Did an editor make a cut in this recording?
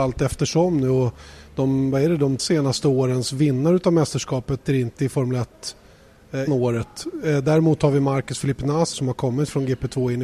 yes; 4 cuts; at 2.4 s, 4.7 s, 6.5 s, 8.9 s

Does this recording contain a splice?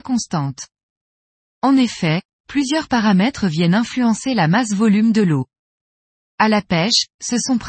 no; 0 cuts

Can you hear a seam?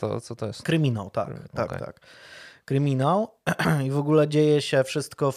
no; 0 cuts

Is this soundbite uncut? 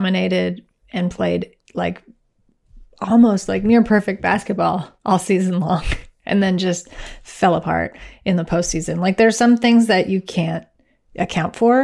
no; 1 cut; at 5.0 s

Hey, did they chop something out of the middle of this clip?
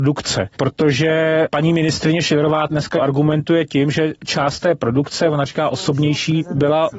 no; 0 cuts

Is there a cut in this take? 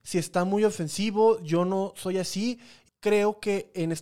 yes; 1 cut; at 2.9 s

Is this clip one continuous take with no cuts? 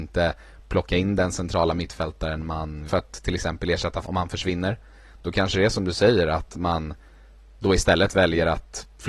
no; 2 cuts; at 2.9 s, 4.0 s

